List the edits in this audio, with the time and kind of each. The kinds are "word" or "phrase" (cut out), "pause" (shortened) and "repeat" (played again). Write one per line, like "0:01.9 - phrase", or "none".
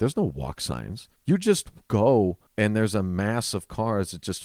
0:01.2 - pause
0:02.5 - pause

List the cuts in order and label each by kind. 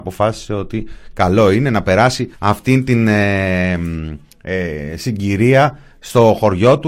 0:02.3 - pause

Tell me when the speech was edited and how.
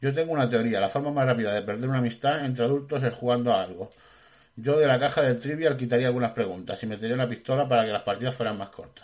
none

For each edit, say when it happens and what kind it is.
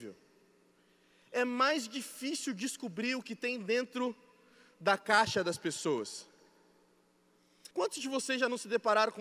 0:07.7 - pause

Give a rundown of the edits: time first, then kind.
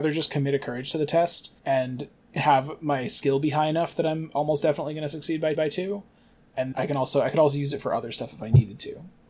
0:01.6 - pause
0:05.5 - repeat
0:06.7 - word

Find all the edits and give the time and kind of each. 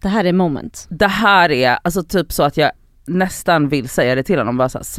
none

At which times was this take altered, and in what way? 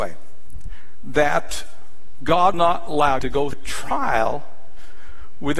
0:02.5 - word
0:03.2 - word
0:03.5 - word

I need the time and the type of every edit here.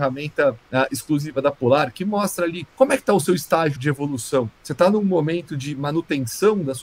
0:02.7 - pause
0:03.8 - word
0:04.5 - pause

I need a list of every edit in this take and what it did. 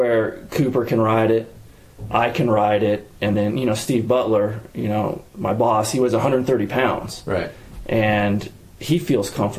none

